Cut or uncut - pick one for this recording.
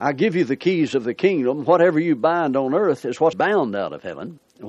cut